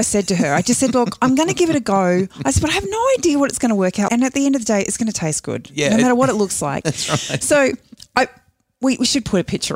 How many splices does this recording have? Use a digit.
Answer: 1